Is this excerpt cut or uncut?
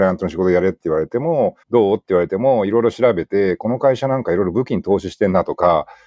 cut